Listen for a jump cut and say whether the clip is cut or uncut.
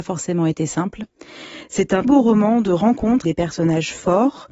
cut